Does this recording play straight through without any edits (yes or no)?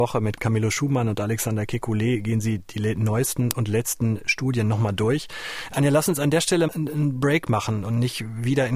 no